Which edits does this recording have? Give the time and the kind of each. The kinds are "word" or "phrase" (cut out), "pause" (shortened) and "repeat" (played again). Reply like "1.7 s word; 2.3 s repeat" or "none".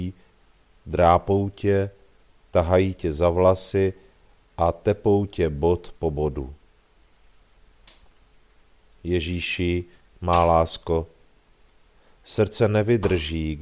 10.1 s pause